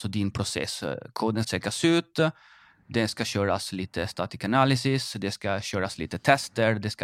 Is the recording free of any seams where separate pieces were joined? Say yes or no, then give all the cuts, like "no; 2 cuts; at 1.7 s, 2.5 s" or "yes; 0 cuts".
no; 1 cut; at 1.4 s